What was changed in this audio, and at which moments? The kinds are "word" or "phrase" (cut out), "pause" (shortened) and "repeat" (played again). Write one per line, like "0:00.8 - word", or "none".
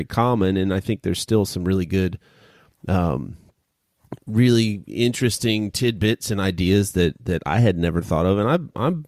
none